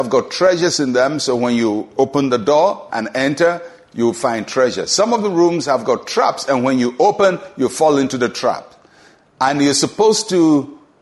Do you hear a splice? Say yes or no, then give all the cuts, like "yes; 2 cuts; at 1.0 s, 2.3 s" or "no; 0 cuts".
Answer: no; 0 cuts